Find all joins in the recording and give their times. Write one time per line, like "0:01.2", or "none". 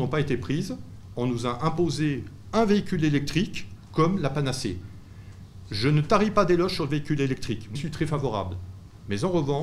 0:07.8